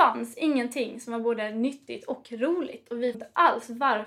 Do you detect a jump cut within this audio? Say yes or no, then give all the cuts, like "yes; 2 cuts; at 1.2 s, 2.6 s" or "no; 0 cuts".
yes; 1 cut; at 3.1 s